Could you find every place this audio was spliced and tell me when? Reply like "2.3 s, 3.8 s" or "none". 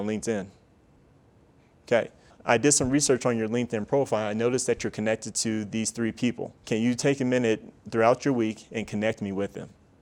2.3 s, 6.6 s